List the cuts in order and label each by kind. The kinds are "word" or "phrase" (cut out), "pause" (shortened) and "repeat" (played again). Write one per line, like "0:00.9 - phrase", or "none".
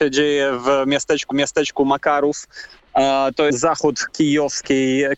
0:01.3 - repeat
0:03.5 - word